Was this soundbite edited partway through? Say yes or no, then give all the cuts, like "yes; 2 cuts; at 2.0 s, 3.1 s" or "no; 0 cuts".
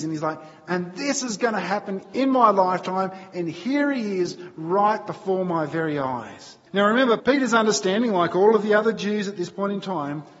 yes; 2 cuts; at 6.7 s, 7.2 s